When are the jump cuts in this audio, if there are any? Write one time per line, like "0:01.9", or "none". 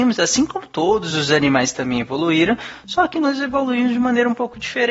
none